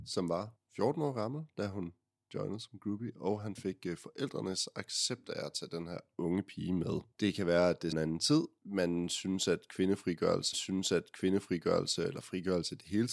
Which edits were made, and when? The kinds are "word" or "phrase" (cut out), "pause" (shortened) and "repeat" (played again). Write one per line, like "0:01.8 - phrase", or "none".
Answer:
0:07.9 - phrase
0:10.5 - repeat

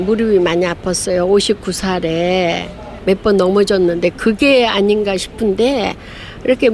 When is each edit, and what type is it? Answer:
none

